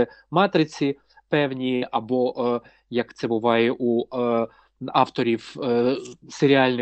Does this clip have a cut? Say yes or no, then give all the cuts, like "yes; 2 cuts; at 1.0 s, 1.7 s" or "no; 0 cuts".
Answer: no; 0 cuts